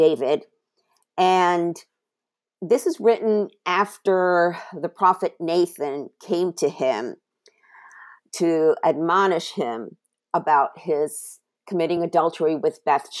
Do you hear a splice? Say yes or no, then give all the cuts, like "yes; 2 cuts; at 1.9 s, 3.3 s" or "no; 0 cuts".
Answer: no; 0 cuts